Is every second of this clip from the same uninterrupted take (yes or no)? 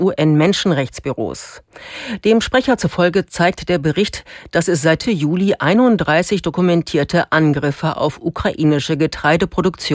no